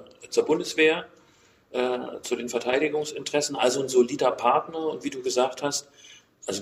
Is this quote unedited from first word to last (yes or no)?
yes